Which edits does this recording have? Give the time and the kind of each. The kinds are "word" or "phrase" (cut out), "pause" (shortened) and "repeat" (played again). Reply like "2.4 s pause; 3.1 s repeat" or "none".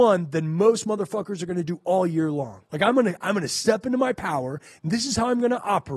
2.7 s pause

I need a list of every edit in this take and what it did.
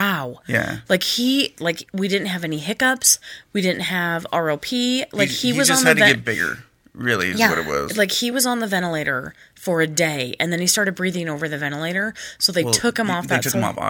none

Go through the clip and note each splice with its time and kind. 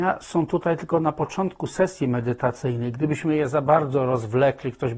none

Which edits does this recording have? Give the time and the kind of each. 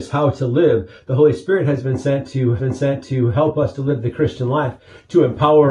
2.6 s repeat

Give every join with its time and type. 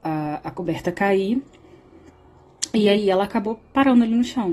none

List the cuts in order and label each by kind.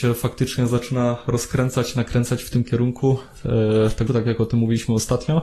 4.1 s word

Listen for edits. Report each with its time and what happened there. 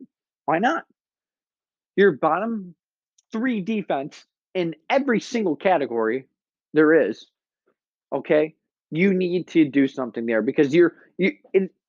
none

